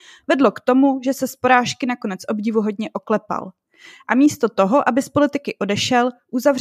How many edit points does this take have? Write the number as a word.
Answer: zero